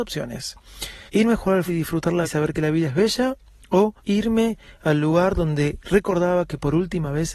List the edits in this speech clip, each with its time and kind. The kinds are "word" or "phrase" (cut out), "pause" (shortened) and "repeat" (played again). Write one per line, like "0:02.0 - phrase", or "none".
0:01.1 - pause
0:01.7 - word
0:02.2 - word
0:04.0 - pause